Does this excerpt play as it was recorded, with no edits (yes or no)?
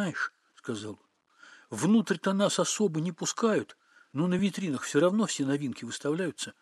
yes